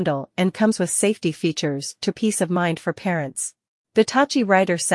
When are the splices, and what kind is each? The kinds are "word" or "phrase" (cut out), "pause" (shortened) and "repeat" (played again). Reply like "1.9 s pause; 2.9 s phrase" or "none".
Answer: 2.1 s word; 3.8 s pause

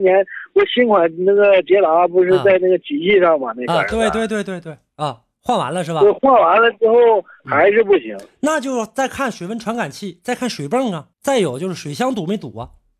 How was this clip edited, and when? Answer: 11.1 s pause

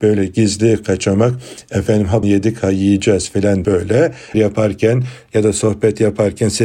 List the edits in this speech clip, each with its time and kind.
2.2 s word; 3.6 s word; 4.3 s word

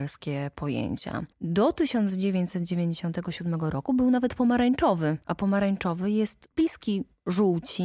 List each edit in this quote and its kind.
1.3 s pause; 5.2 s pause; 6.5 s pause

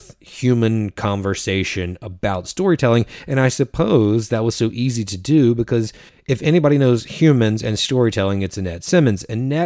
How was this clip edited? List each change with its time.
6.1 s pause

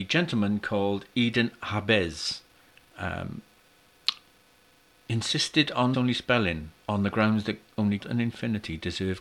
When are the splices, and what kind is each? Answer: 2.7 s pause; 5.9 s word; 6.8 s pause; 8.0 s word

